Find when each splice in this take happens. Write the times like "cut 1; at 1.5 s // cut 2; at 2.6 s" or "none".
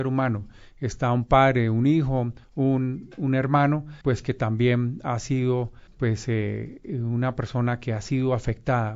cut 1; at 2.4 s // cut 2; at 4.0 s // cut 3; at 5.9 s